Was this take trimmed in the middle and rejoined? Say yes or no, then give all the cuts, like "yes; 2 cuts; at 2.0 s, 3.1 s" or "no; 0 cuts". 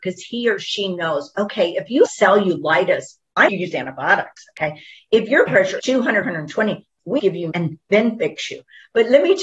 yes; 7 cuts; at 2.1 s, 3.5 s, 5.5 s, 5.8 s, 6.2 s, 7.2 s, 7.5 s